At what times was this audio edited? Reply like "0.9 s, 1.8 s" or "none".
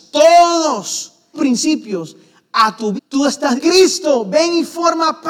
1.3 s, 3.0 s, 3.6 s